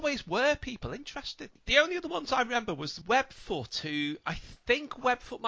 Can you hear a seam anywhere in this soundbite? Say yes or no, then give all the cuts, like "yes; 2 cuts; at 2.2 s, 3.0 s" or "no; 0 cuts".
no; 0 cuts